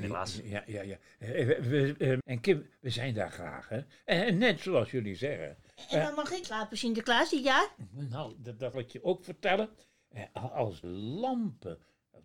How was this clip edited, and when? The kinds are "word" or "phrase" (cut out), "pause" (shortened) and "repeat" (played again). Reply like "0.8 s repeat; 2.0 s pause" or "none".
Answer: 2.2 s word; 4.6 s word; 6.4 s word; 8.7 s word; 10.8 s word